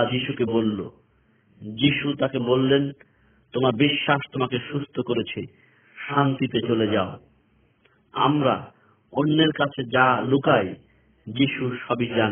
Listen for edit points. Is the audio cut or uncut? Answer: uncut